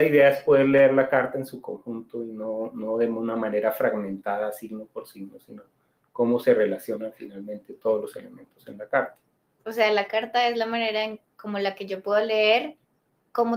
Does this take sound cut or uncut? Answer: uncut